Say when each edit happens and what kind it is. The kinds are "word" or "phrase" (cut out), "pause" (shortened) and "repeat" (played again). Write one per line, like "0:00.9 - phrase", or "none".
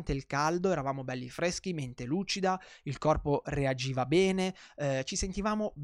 none